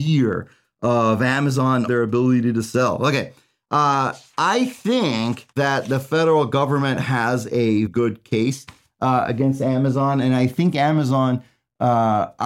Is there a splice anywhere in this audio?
yes; 3 cuts; at 1.9 s, 5.5 s, 7.9 s

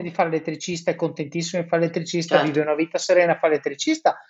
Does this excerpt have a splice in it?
no; 0 cuts

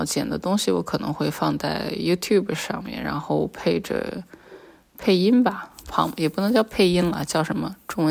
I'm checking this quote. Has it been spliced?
no; 0 cuts

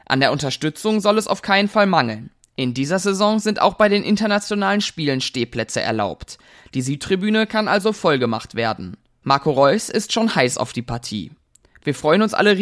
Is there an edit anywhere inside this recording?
no; 0 cuts

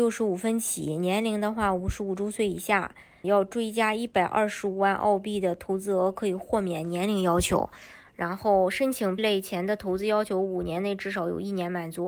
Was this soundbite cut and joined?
yes; 2 cuts; at 3.2 s, 9.2 s

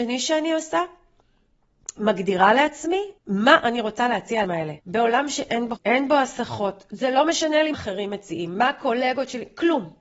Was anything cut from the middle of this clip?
yes; 6 cuts; at 2.0 s, 3.2 s, 4.4 s, 4.8 s, 5.8 s, 7.7 s

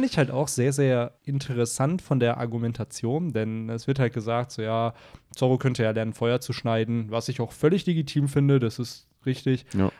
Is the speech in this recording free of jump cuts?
no; 1 cut; at 1.2 s

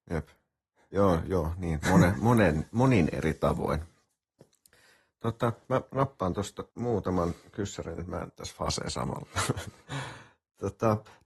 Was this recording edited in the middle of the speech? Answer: yes; 3 cuts; at 1.8 s, 6.7 s, 8.3 s

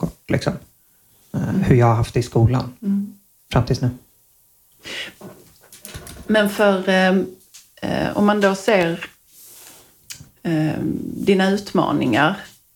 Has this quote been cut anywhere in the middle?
no; 0 cuts

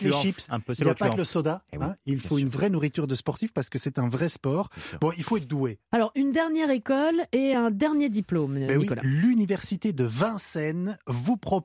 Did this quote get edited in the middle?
no; 0 cuts

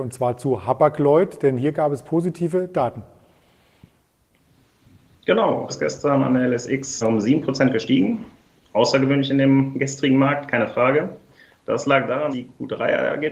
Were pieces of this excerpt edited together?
yes; 3 cuts; at 5.7 s, 7.0 s, 12.3 s

